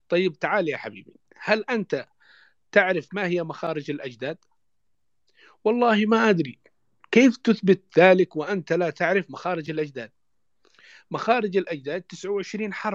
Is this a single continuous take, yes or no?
yes